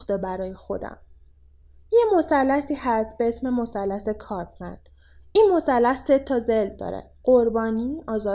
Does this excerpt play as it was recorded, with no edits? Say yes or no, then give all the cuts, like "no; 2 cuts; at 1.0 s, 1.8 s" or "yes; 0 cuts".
no; 1 cut; at 7.2 s